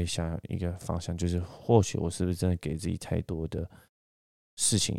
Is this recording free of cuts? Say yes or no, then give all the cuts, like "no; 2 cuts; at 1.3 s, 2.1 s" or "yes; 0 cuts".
yes; 0 cuts